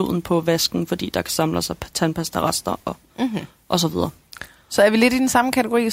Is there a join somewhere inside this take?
no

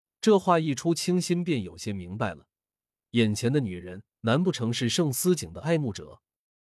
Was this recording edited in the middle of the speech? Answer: yes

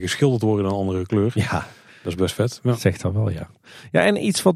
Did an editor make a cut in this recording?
no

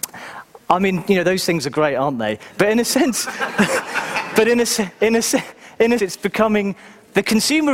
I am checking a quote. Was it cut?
yes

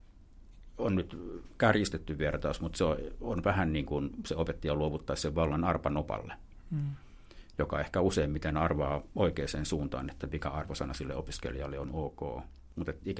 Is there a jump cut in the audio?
no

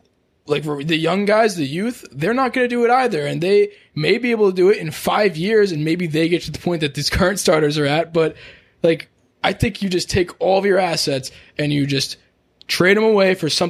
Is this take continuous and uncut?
yes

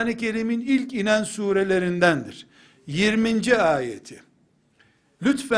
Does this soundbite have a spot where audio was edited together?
no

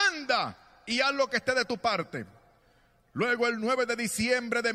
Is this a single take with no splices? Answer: yes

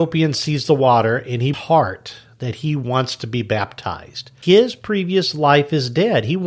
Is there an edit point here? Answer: yes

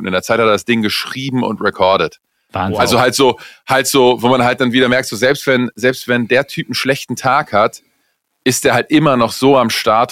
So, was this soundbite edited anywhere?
no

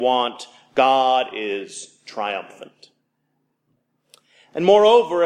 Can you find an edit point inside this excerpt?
yes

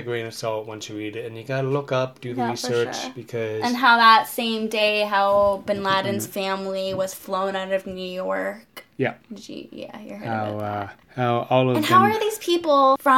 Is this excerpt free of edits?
yes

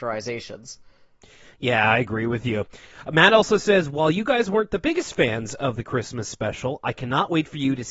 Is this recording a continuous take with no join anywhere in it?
yes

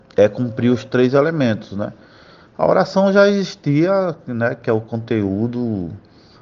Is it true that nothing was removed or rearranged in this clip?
yes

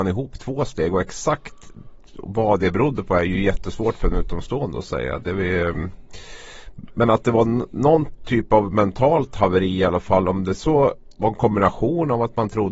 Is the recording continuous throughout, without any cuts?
yes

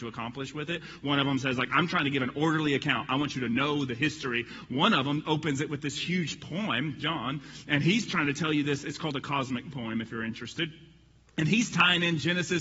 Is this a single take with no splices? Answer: yes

